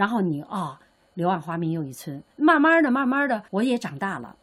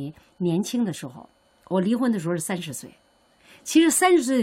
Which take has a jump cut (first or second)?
first